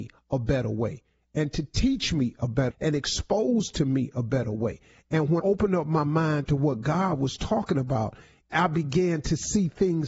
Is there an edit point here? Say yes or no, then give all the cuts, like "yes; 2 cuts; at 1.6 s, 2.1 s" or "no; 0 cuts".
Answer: yes; 2 cuts; at 2.7 s, 5.4 s